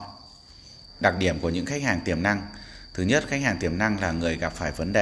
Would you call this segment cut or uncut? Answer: uncut